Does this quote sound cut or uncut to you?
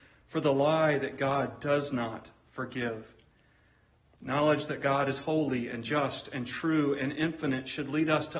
uncut